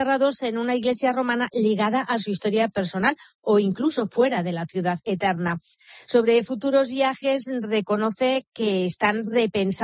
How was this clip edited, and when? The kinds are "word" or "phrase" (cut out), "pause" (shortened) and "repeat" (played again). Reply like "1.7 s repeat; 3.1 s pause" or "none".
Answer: none